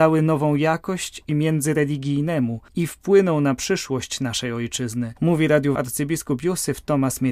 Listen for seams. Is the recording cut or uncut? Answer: cut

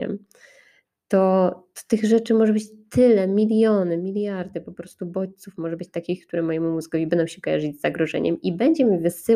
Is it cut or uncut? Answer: uncut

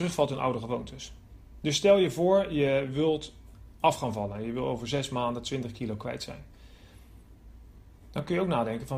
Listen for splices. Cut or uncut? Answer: uncut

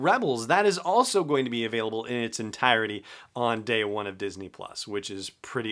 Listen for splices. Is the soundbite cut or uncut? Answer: uncut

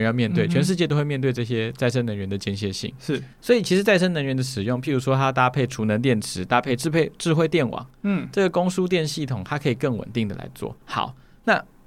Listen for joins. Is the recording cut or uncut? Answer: cut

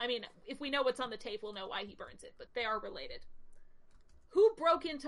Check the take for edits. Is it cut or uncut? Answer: cut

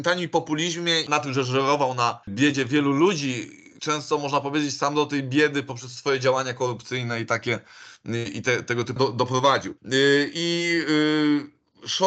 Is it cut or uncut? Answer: cut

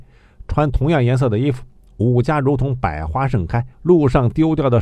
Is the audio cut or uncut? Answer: cut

